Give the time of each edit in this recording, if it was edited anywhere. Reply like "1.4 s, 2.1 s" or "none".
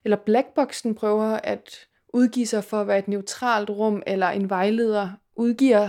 none